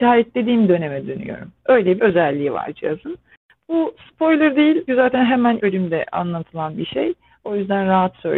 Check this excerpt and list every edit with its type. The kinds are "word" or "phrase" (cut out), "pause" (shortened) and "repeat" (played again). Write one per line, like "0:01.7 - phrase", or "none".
0:02.0 - word
0:04.9 - word
0:05.6 - word